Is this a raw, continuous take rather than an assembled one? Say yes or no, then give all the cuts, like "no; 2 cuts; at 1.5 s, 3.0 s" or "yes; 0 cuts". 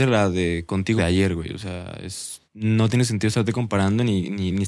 no; 2 cuts; at 1.0 s, 2.5 s